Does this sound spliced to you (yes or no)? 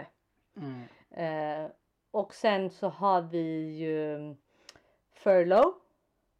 no